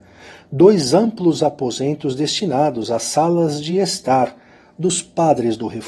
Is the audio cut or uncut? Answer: uncut